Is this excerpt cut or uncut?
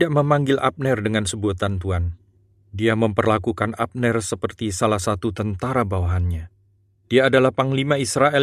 uncut